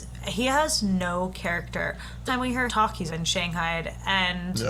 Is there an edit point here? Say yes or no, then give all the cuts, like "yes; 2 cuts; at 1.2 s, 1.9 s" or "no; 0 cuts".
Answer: yes; 3 cuts; at 2.3 s, 2.7 s, 3.1 s